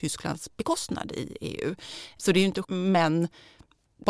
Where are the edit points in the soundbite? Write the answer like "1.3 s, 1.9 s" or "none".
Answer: 2.6 s